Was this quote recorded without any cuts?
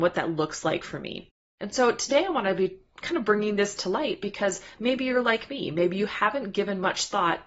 yes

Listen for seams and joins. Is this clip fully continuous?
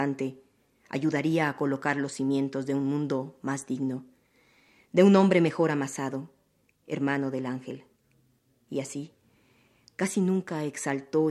yes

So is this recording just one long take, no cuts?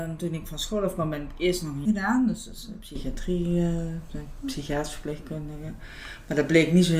no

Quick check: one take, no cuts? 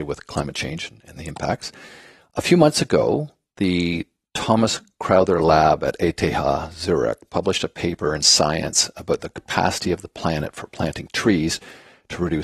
yes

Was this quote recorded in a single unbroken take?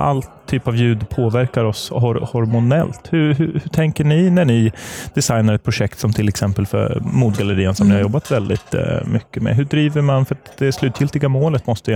yes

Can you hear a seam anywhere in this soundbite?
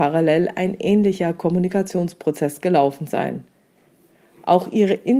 no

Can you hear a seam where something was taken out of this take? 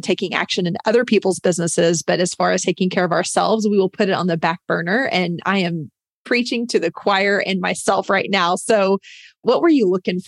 no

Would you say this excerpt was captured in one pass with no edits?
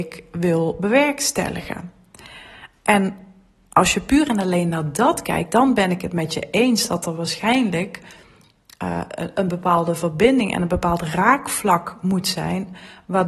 yes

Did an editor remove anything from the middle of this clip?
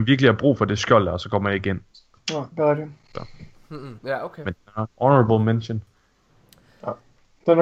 yes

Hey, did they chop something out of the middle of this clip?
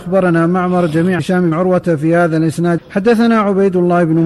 yes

